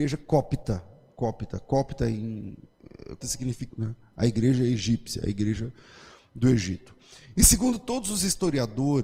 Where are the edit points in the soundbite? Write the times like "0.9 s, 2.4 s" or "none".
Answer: 3.2 s, 3.7 s

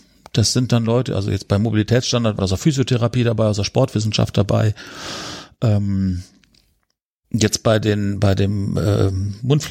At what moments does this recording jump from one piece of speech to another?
2.4 s

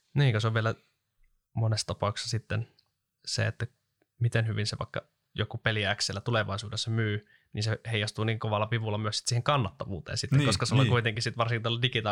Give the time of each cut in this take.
none

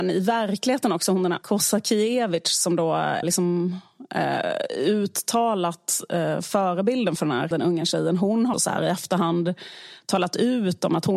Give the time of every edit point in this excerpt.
1.4 s, 3.2 s, 7.5 s, 8.5 s

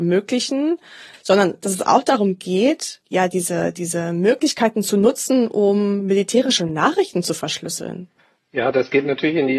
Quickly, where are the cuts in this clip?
8.2 s

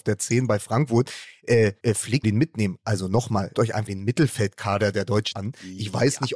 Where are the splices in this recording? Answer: 1.8 s, 2.2 s, 3.5 s, 3.9 s, 5.3 s

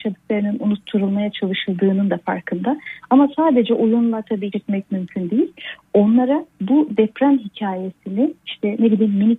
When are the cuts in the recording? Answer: 4.5 s, 6.5 s, 8.4 s

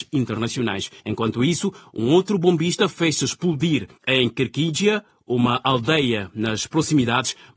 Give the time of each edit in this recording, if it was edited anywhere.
1.0 s, 3.9 s

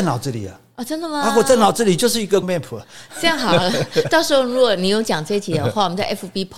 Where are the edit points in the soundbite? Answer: 2.4 s

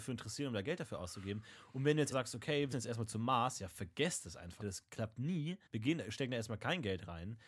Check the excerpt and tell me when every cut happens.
2.1 s, 2.7 s, 4.6 s, 5.7 s

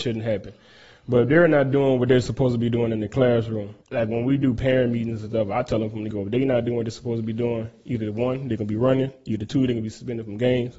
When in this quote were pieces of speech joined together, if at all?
3.8 s, 6.1 s

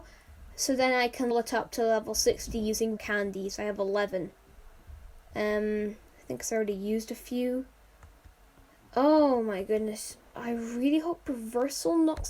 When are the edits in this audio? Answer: 1.3 s, 3.0 s

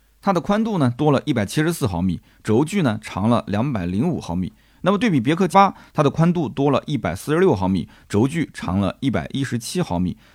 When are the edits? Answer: 5.5 s

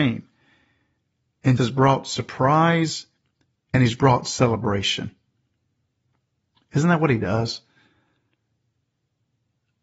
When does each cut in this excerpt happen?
1.6 s

